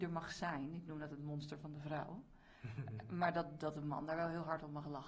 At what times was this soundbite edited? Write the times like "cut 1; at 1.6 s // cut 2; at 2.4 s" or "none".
none